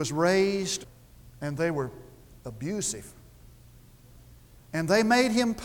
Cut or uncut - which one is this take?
uncut